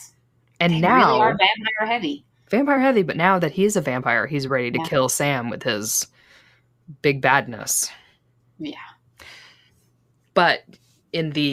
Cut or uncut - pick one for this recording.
uncut